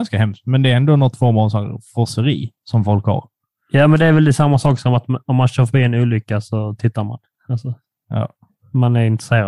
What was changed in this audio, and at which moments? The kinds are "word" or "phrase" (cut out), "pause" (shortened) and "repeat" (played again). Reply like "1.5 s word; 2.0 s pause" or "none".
none